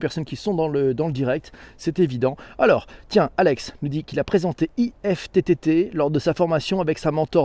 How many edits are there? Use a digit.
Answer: 0